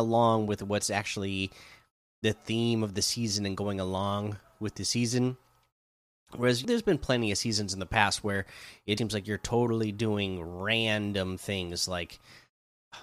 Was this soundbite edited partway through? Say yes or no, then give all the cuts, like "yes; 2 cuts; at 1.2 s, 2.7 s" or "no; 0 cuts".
yes; 2 cuts; at 6.6 s, 9.0 s